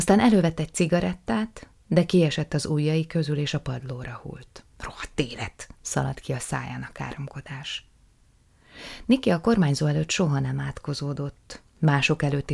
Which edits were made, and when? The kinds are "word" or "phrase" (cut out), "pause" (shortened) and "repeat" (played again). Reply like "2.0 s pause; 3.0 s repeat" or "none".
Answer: 4.7 s pause; 5.8 s pause